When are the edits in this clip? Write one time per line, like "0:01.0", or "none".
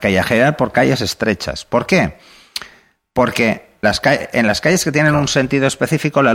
0:03.8